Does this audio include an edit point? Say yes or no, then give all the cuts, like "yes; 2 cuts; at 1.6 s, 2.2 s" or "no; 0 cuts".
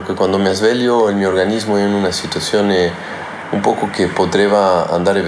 no; 0 cuts